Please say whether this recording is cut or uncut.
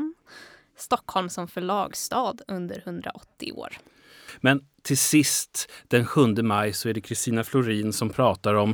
uncut